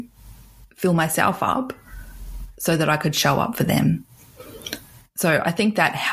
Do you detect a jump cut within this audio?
no; 0 cuts

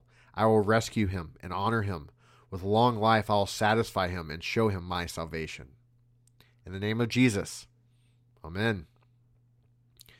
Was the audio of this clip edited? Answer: no; 0 cuts

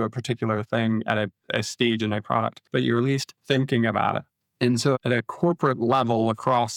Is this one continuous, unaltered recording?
no; 3 cuts; at 2.7 s, 3.4 s, 4.3 s

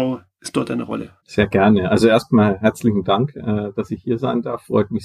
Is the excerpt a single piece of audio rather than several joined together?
yes; 0 cuts

